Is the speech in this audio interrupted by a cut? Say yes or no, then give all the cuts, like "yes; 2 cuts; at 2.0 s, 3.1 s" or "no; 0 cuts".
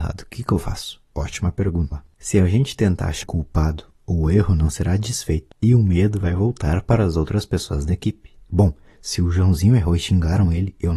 yes; 2 cuts; at 1.9 s, 3.2 s